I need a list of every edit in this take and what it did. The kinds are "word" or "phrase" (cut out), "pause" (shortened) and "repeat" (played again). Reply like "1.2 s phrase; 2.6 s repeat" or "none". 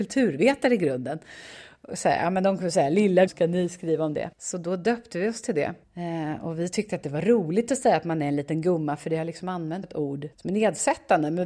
3.3 s word; 4.3 s pause; 9.8 s word; 10.3 s pause